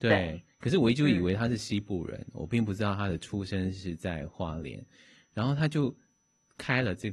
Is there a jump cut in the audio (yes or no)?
no